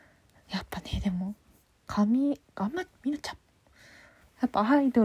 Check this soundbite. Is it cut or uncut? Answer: uncut